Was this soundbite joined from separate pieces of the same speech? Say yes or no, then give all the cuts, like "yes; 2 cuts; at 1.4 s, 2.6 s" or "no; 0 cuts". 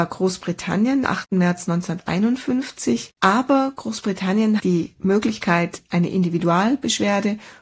yes; 3 cuts; at 1.1 s, 3.2 s, 4.6 s